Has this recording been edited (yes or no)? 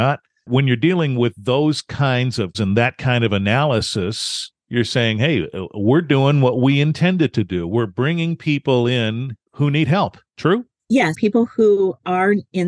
yes